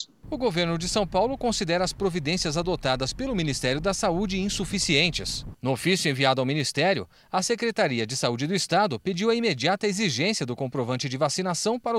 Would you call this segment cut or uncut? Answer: uncut